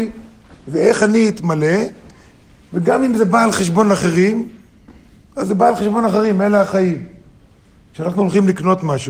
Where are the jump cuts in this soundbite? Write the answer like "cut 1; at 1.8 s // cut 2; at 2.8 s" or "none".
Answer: none